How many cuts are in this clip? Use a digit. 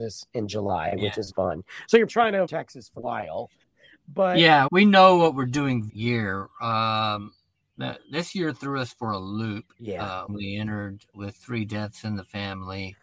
9